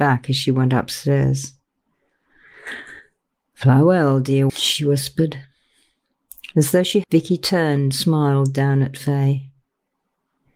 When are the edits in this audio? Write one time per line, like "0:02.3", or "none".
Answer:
0:04.5
0:07.0
0:07.9